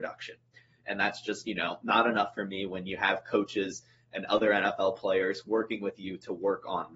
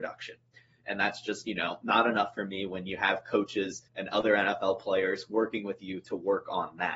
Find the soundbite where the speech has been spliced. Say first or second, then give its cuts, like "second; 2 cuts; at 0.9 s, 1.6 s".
second; 1 cut; at 3.9 s